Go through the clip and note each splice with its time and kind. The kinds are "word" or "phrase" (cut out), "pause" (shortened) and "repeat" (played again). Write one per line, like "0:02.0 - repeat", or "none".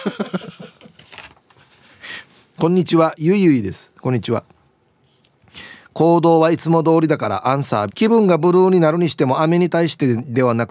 0:07.9 - word